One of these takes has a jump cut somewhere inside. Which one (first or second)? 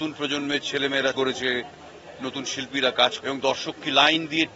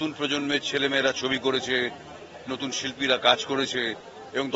first